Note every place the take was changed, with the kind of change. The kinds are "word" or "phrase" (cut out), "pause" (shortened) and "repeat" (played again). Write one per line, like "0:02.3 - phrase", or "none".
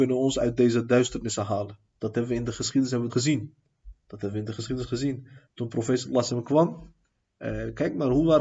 0:01.9 - pause
0:03.1 - word
0:04.0 - pause